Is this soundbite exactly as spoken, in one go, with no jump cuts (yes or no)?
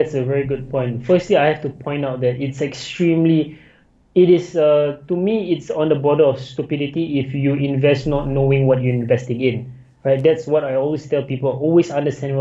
yes